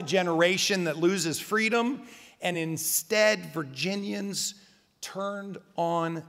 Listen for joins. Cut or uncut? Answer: uncut